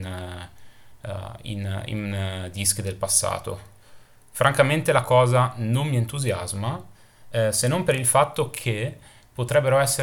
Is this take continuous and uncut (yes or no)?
yes